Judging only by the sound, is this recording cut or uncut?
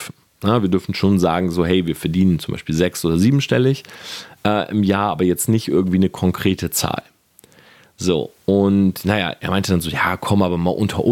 uncut